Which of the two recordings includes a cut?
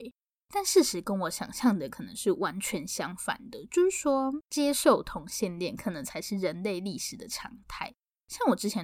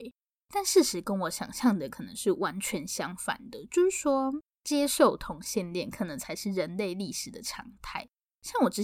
first; 1 cut; at 4.4 s

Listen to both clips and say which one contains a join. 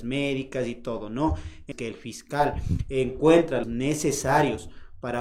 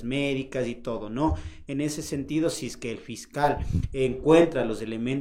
first; 2 cuts; at 1.7 s, 3.6 s

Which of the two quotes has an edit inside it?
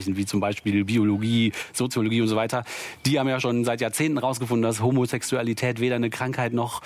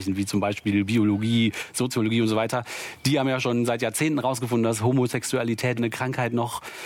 second; 1 cut; at 5.8 s

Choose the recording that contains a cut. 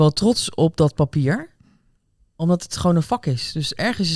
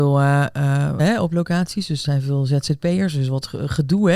second; 2 cuts; at 1.0 s, 2.1 s

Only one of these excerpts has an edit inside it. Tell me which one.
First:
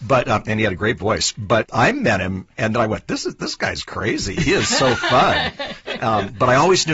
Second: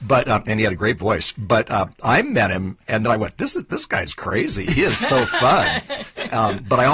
first; 1 cut; at 1.6 s

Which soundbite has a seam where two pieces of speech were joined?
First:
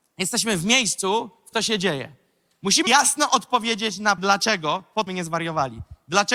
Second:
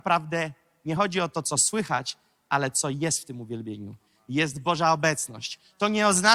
first; 4 cuts; at 1.5 s, 2.9 s, 4.2 s, 5.1 s

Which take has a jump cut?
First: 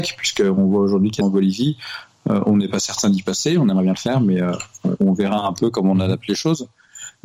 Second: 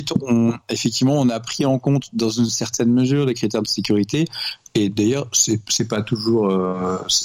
first; 1 cut; at 1.2 s

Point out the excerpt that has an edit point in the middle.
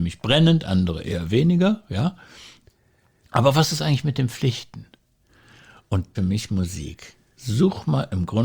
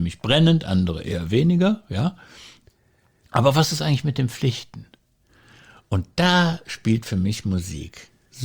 first; 1 cut; at 6.1 s

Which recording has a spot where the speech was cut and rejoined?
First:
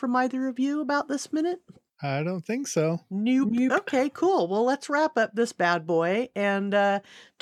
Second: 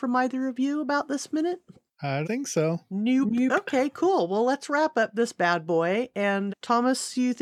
second; 2 cuts; at 2.2 s, 6.5 s

